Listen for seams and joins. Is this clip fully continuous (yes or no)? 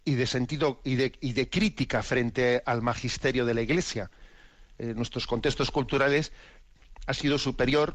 yes